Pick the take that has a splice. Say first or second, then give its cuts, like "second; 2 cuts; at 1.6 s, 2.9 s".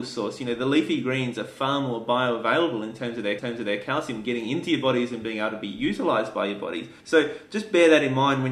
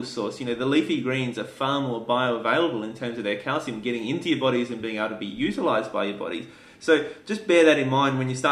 first; 2 cuts; at 3.4 s, 7.0 s